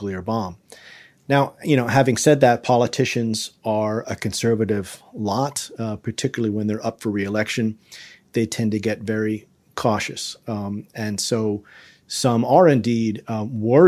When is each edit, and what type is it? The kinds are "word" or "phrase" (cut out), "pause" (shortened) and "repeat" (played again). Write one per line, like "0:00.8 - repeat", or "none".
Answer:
0:04.0 - word